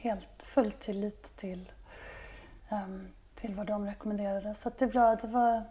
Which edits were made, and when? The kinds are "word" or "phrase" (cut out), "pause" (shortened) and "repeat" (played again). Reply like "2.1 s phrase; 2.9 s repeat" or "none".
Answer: 2.6 s pause